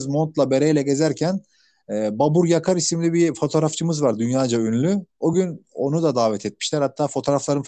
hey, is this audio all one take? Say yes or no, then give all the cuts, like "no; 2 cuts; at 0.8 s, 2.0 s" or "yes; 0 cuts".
yes; 0 cuts